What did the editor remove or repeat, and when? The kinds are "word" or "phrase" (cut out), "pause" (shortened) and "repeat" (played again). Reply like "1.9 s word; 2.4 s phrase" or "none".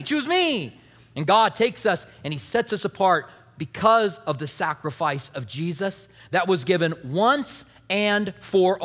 none